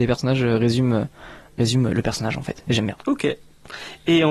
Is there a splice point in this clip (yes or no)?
yes